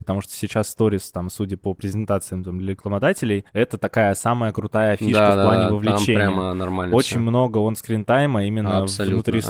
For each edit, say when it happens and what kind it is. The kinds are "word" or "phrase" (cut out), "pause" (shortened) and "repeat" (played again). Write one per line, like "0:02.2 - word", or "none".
0:03.5 - pause